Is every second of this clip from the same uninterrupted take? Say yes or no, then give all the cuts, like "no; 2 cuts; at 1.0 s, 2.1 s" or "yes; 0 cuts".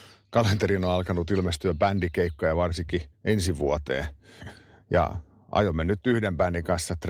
no; 1 cut; at 3.1 s